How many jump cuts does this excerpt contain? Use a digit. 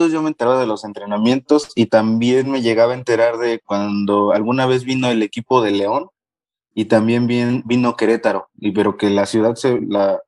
0